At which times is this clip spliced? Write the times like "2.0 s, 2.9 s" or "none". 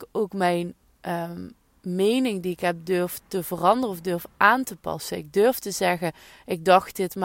none